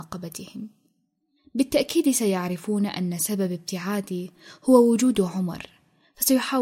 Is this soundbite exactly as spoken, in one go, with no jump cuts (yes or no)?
yes